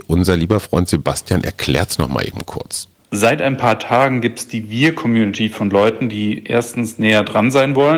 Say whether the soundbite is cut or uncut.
uncut